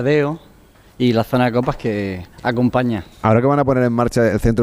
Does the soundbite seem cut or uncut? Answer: cut